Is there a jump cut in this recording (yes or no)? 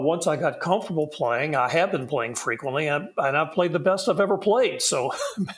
no